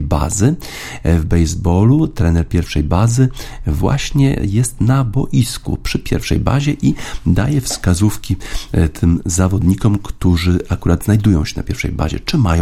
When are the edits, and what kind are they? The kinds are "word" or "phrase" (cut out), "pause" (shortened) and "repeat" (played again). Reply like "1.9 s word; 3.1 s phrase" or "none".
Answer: none